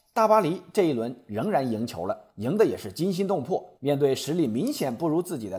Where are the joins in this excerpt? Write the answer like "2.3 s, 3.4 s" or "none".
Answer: 2.3 s, 3.8 s